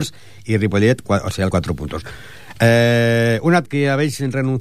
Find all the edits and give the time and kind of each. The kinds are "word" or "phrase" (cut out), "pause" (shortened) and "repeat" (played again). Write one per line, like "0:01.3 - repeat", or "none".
0:01.0 - word
0:01.5 - phrase
0:03.6 - word